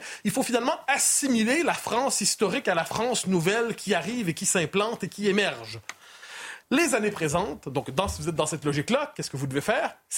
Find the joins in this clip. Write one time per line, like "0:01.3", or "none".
0:06.6